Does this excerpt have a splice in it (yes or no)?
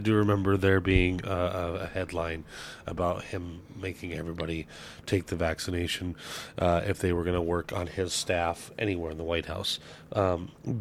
no